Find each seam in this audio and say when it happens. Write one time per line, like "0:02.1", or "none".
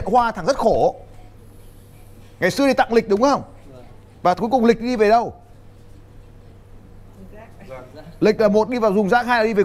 none